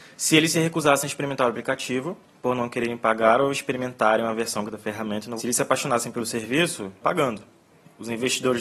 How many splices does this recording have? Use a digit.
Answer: 4